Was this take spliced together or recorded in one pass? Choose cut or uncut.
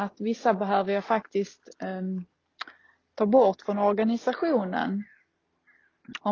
uncut